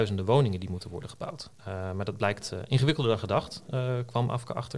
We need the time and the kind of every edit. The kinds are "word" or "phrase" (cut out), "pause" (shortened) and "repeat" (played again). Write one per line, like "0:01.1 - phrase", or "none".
0:01.5 - pause